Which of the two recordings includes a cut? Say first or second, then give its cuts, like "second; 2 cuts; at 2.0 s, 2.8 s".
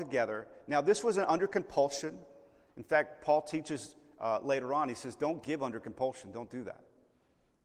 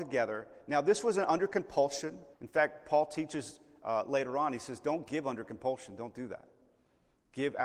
second; 1 cut; at 2.3 s